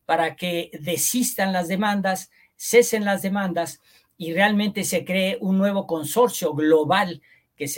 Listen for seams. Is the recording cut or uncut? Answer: uncut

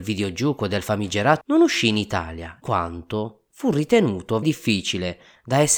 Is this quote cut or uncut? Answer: cut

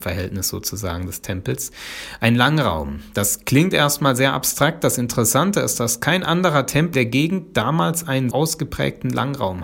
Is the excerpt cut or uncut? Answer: cut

